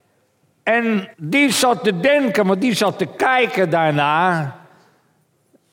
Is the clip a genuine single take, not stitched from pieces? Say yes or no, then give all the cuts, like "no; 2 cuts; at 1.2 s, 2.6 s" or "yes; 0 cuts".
no; 1 cut; at 1.1 s